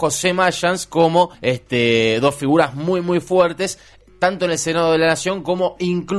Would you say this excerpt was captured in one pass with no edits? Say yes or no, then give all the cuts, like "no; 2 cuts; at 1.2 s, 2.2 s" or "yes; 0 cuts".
no; 1 cut; at 1.3 s